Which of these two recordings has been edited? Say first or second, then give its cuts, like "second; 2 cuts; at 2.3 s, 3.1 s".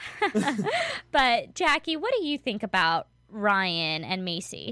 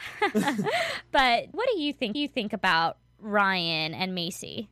second; 2 cuts; at 1.5 s, 2.1 s